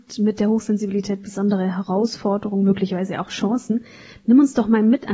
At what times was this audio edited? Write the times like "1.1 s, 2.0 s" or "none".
none